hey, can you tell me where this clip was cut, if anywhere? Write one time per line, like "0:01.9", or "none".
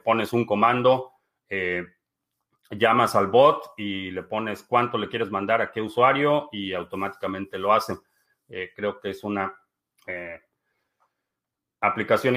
none